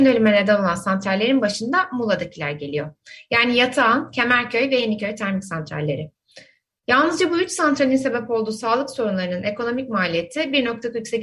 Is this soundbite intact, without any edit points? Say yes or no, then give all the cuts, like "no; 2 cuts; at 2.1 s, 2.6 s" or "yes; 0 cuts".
yes; 0 cuts